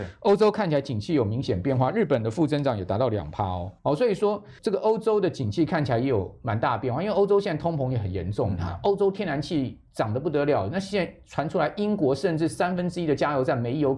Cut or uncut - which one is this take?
cut